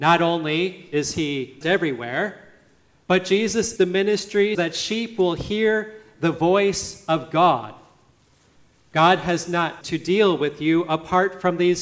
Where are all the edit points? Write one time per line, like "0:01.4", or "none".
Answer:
0:01.6
0:03.8
0:04.5
0:09.8

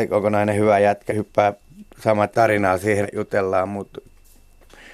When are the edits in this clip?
0:01.1
0:02.3
0:03.0

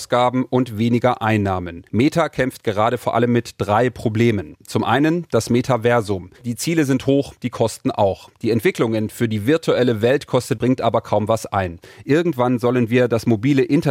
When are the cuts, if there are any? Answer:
0:01.9
0:06.3
0:10.6

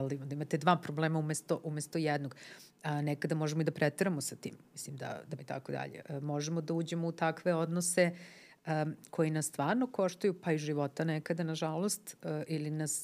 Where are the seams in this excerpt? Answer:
0:05.4

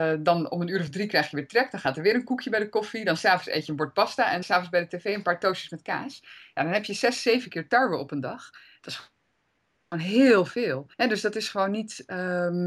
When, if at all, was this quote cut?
0:04.4
0:10.9

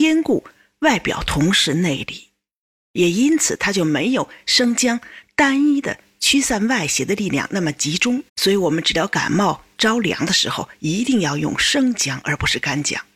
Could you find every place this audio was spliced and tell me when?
0:08.3

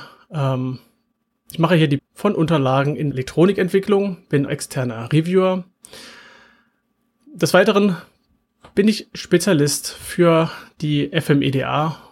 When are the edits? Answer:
0:02.0
0:03.1
0:04.5

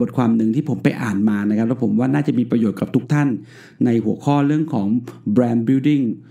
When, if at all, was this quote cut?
none

